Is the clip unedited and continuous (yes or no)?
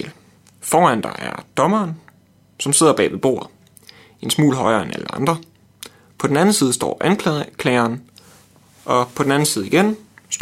yes